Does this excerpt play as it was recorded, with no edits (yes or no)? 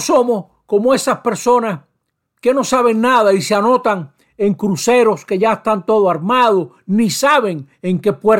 yes